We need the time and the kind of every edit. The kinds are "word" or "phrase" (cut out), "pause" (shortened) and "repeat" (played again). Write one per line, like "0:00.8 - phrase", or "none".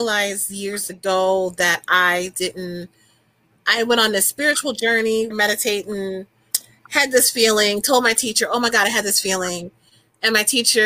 0:05.3 - word